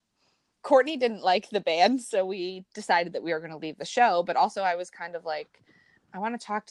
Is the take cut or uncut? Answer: uncut